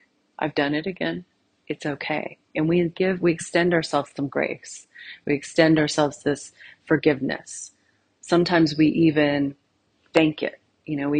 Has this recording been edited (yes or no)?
no